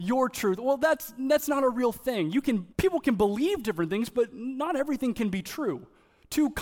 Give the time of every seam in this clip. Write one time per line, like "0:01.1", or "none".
0:02.7